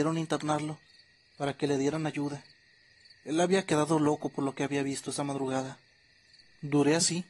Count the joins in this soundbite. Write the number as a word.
zero